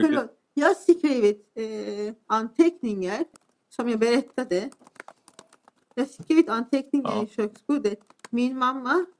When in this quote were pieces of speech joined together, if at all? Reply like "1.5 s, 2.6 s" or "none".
none